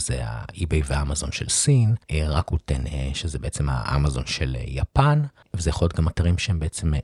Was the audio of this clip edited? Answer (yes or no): yes